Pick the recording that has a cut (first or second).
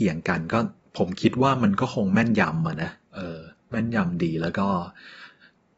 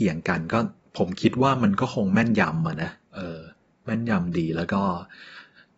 first